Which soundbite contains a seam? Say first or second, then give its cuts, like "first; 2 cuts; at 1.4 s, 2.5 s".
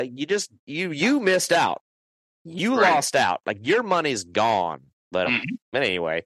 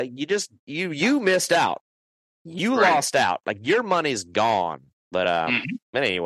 first; 1 cut; at 5.2 s